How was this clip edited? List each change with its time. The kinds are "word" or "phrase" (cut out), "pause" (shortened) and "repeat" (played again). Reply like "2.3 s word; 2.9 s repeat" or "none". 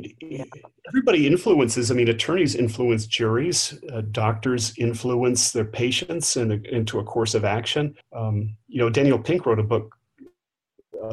8.0 s pause